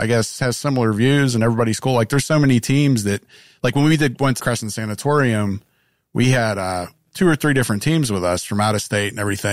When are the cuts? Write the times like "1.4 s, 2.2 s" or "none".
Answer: 4.4 s, 7.1 s

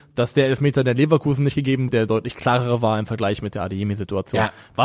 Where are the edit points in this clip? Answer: 1.9 s

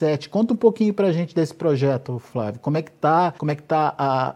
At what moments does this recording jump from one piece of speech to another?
3.4 s

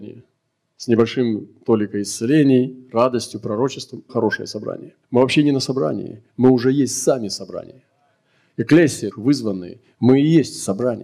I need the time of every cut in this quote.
4.1 s, 5.0 s, 9.1 s

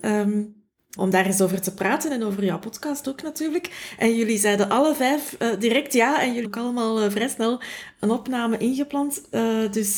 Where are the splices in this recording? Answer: 1.0 s, 6.4 s

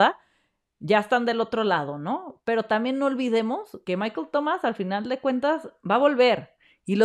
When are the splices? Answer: 3.8 s

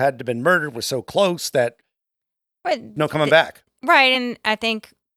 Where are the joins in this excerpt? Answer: none

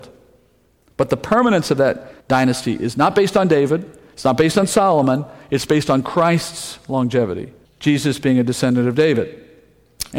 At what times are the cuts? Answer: 2.2 s, 7.6 s

